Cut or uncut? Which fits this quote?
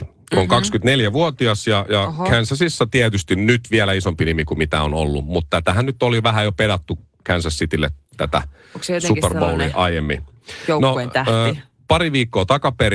uncut